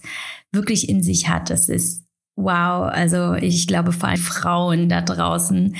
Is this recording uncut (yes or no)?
no